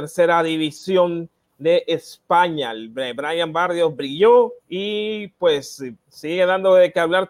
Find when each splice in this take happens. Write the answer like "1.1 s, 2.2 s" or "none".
4.6 s, 6.0 s